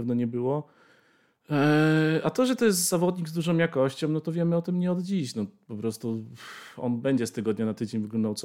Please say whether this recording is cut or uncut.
uncut